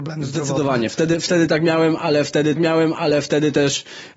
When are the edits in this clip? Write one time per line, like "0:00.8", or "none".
0:02.6